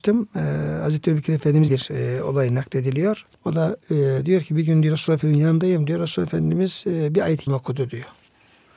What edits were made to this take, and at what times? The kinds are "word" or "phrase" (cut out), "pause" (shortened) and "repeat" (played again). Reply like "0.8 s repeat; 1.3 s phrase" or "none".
1.7 s word; 3.3 s pause; 3.8 s pause; 7.5 s word